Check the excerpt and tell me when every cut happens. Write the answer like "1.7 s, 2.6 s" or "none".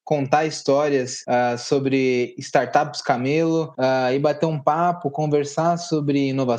none